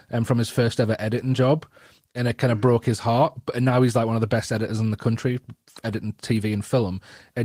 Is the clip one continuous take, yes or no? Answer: yes